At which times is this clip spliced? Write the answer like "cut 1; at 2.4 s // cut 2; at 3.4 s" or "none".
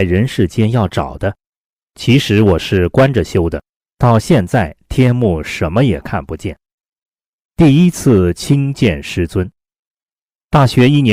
none